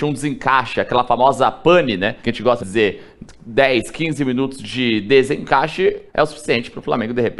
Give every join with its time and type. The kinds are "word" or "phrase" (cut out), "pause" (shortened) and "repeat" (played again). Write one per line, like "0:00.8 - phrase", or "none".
0:02.2 - pause
0:02.6 - word
0:06.1 - pause